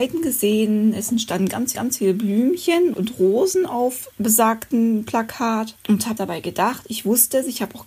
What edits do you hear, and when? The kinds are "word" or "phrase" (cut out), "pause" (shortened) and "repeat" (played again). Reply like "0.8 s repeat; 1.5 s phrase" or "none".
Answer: 1.7 s repeat; 2.9 s word; 4.1 s pause; 6.2 s phrase